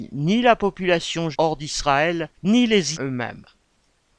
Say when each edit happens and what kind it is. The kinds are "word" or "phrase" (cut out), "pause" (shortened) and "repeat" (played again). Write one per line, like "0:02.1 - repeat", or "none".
0:01.3 - word
0:02.3 - pause
0:02.9 - word